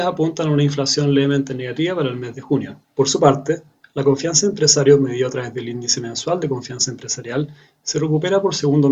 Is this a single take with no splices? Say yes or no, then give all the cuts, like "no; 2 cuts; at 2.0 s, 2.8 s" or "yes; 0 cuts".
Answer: yes; 0 cuts